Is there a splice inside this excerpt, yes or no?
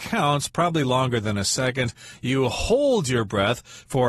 no